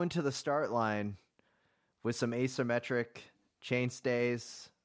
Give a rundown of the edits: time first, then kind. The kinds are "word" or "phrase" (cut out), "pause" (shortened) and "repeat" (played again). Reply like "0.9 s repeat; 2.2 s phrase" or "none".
none